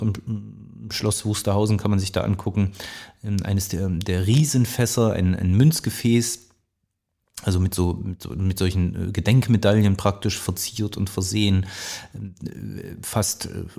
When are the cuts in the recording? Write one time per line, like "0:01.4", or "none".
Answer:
none